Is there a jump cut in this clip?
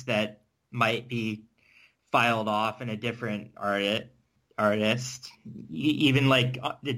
no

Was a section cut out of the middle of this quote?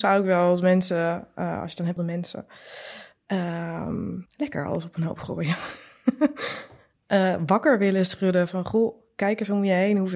yes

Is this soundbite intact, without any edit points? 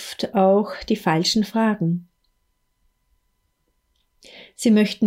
yes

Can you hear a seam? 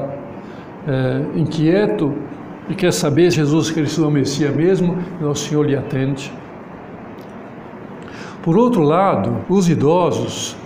yes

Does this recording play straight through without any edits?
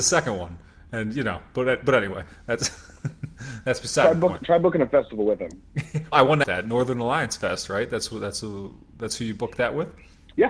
no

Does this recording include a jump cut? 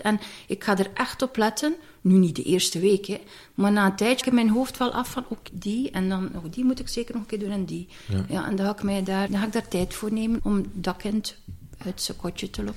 yes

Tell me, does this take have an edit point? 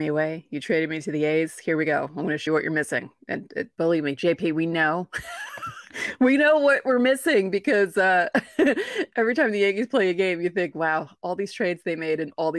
yes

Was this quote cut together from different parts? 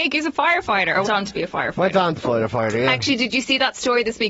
yes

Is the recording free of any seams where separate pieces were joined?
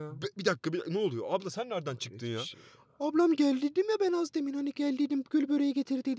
yes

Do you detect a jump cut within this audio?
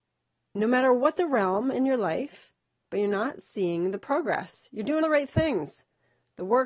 yes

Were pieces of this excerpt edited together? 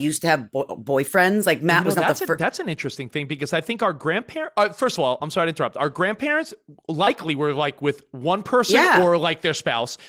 no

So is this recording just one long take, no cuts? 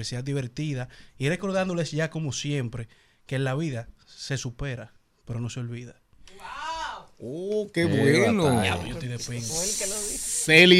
yes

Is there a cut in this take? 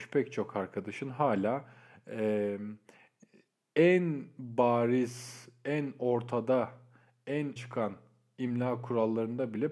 yes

